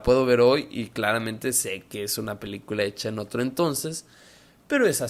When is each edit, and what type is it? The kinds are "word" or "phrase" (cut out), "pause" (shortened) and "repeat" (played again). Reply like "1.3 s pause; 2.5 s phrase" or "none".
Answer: none